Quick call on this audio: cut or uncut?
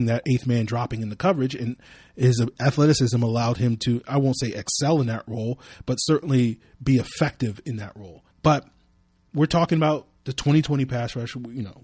cut